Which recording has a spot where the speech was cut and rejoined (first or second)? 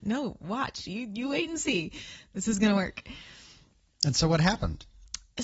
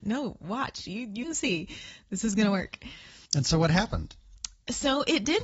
second